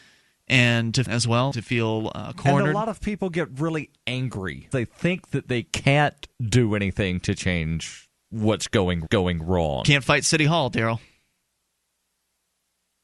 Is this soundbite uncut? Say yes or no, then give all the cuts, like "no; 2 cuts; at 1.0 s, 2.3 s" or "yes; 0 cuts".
no; 5 cuts; at 1.1 s, 1.5 s, 4.7 s, 6.3 s, 9.1 s